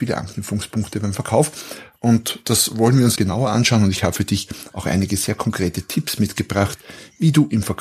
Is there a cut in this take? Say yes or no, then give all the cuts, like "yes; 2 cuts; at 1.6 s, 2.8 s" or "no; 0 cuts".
yes; 1 cut; at 3.2 s